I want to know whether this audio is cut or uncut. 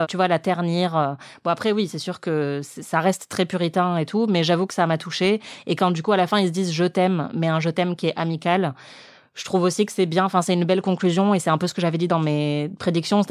uncut